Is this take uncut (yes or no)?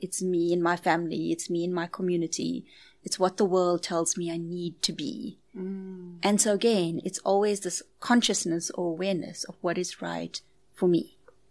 yes